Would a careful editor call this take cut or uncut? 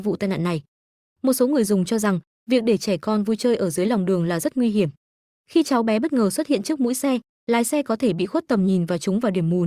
uncut